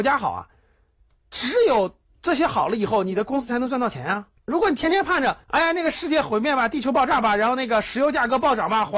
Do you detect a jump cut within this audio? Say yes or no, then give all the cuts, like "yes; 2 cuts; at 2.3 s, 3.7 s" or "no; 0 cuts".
yes; 2 cuts; at 4.4 s, 5.4 s